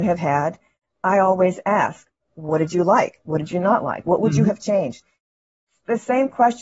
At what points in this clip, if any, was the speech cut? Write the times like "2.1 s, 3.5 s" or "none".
none